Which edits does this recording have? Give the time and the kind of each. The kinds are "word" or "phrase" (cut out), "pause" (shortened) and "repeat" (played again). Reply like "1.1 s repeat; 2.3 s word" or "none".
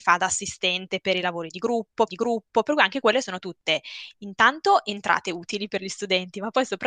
2.1 s repeat